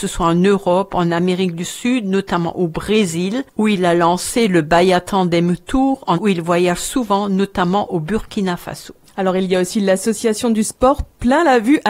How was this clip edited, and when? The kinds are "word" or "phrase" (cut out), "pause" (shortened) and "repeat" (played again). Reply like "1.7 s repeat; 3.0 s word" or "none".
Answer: 6.1 s word

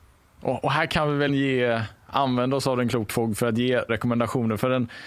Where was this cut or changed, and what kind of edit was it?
1.3 s word; 3.1 s word; 3.9 s word

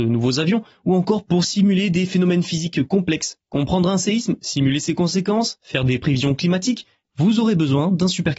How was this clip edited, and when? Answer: none

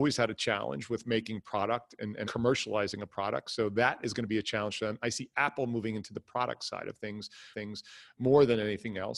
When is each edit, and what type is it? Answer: 2.2 s word; 7.5 s repeat

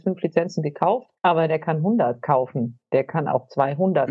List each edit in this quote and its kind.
1.2 s pause

